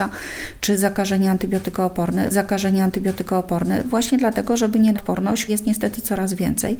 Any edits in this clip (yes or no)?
yes